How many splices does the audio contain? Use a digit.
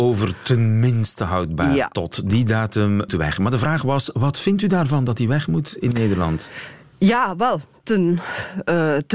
1